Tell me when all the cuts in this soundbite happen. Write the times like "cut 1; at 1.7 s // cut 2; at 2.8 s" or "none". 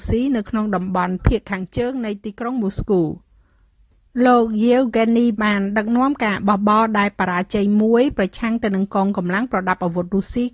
cut 1; at 1.2 s // cut 2; at 5.4 s